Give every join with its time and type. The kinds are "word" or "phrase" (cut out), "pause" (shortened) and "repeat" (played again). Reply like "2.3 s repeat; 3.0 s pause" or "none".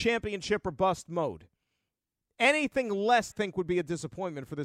3.3 s phrase